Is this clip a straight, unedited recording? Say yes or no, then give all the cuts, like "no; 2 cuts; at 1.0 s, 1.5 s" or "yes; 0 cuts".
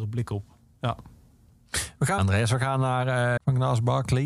no; 2 cuts; at 2.2 s, 3.4 s